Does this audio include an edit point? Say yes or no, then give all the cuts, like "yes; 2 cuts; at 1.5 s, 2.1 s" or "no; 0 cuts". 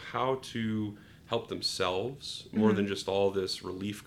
no; 0 cuts